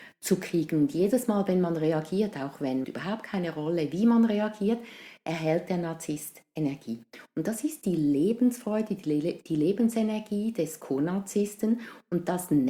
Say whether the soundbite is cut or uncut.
cut